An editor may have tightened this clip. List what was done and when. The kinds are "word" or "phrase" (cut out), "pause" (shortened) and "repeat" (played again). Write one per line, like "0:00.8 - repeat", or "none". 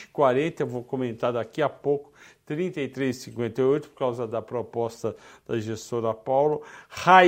none